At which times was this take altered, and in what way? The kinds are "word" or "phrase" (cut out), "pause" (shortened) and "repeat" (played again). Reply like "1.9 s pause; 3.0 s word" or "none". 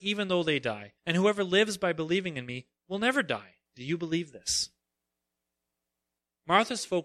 1.0 s pause; 3.7 s pause